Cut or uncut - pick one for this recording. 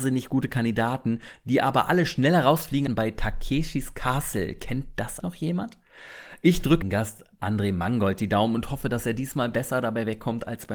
cut